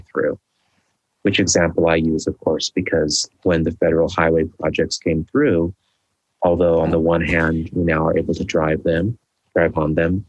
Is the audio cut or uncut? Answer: uncut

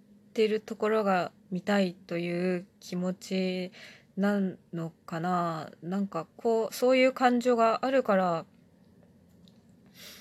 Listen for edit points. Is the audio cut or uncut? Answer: cut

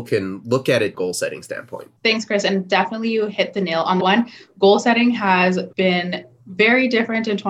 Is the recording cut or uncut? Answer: cut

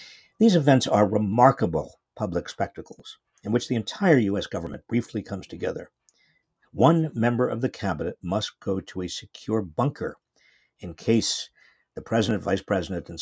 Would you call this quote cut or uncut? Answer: uncut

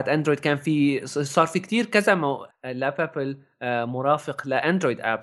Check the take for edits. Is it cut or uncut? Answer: cut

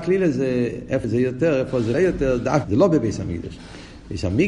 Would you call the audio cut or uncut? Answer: cut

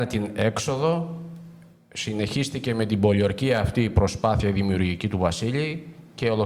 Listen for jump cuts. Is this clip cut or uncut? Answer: uncut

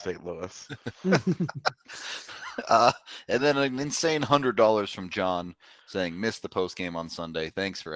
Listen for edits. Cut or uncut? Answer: uncut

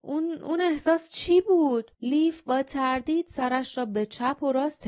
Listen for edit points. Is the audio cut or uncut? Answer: cut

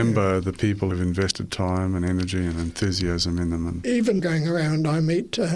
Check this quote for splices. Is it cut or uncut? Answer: cut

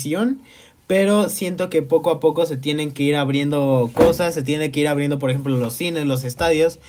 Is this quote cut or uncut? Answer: uncut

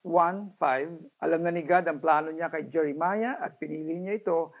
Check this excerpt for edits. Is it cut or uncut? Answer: cut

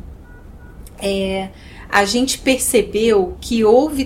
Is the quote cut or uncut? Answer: uncut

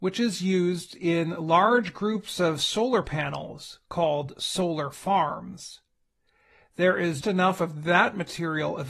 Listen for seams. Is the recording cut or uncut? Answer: cut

